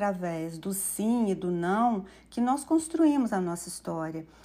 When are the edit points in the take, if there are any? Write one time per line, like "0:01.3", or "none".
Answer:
none